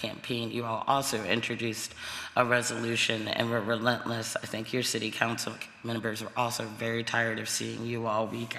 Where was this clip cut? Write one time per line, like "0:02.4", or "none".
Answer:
none

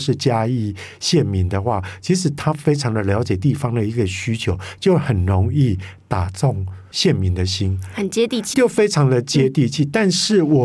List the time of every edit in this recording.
0:08.5

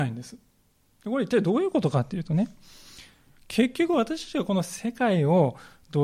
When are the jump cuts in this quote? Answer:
none

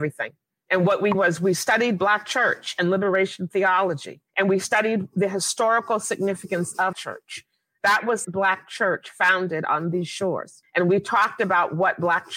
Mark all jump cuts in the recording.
0:01.1
0:04.3
0:06.9
0:08.2

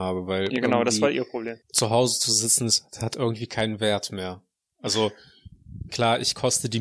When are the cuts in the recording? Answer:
0:01.6

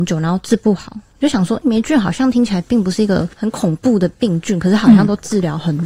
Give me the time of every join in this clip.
0:01.6

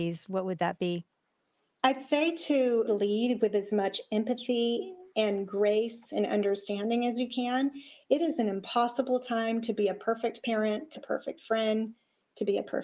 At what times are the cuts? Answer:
0:02.9
0:10.9

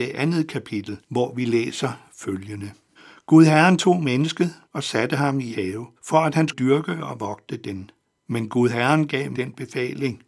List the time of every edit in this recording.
0:01.0
0:03.0
0:04.6
0:05.5
0:06.0
0:06.5
0:08.0
0:09.3

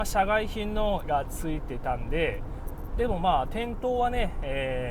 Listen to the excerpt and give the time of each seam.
0:01.0

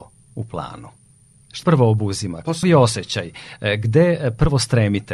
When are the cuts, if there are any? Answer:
0:01.6
0:02.6

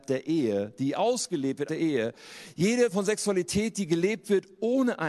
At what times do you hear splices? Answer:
0:01.7
0:02.9

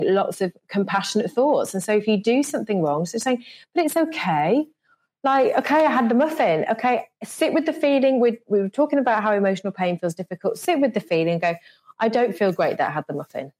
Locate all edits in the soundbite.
none

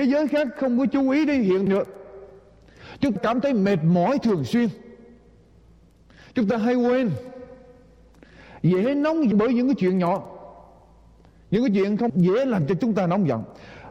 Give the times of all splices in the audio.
0:01.7
0:03.2
0:09.3
0:12.1

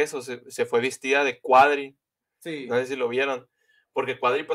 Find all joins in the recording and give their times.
none

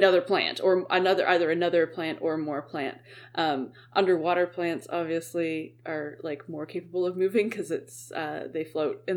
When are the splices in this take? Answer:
none

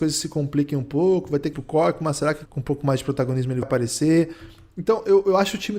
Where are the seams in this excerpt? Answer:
0:01.5
0:02.5
0:03.6

